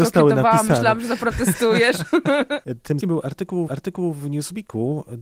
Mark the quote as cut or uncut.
cut